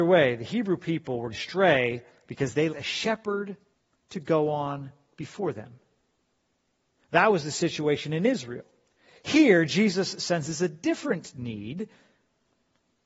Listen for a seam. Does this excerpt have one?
yes; 3 cuts; at 1.3 s, 2.7 s, 3.7 s

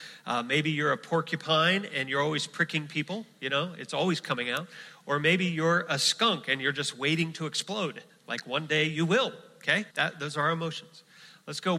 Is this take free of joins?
no; 1 cut; at 9.9 s

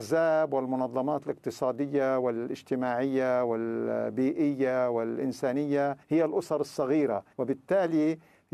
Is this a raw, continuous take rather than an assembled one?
no; 2 cuts; at 6.0 s, 7.3 s

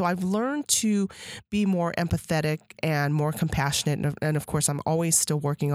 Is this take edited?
no; 0 cuts

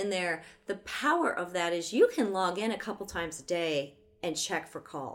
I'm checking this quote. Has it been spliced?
no; 0 cuts

